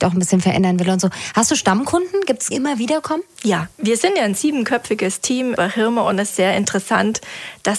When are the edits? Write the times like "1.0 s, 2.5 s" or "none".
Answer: 2.5 s, 3.7 s, 6.3 s